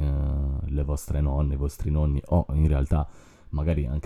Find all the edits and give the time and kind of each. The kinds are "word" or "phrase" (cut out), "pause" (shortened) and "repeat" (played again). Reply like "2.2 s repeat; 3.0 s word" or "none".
none